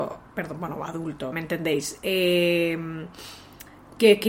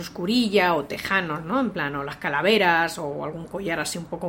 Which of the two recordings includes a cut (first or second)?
first